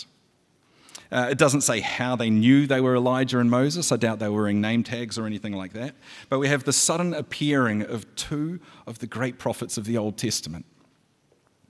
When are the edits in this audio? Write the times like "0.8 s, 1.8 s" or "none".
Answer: none

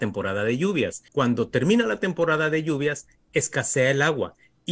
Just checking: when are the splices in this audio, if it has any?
1.1 s

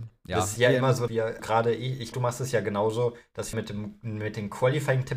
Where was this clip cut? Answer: 1.1 s, 1.4 s, 2.1 s, 3.5 s

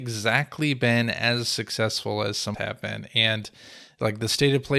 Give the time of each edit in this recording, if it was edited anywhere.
2.5 s

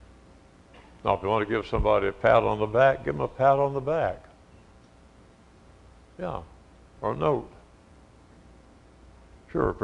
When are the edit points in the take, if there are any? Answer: none

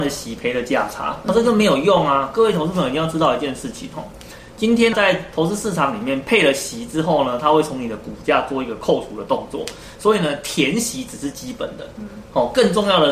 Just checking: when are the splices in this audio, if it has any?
1.2 s, 4.9 s

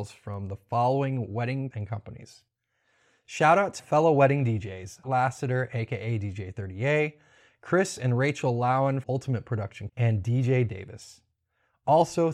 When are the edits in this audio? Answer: 1.7 s, 3.8 s, 5.0 s, 9.0 s, 9.9 s, 10.7 s

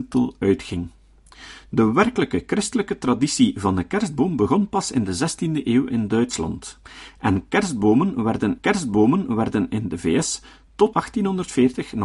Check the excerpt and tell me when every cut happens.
8.6 s, 10.9 s

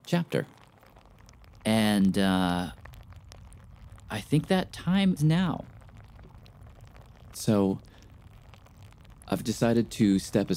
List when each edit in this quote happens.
5.2 s

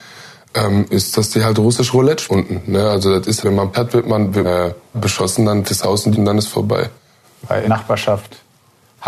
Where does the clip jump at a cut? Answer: 2.3 s, 3.4 s, 3.7 s, 4.4 s, 4.9 s, 5.6 s, 6.1 s, 7.7 s

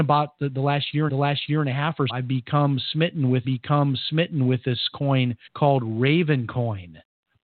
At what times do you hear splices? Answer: 1.1 s, 2.1 s, 3.4 s, 5.5 s

